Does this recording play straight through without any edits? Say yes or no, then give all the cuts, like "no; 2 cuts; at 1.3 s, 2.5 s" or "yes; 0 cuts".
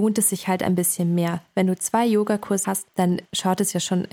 no; 1 cut; at 2.6 s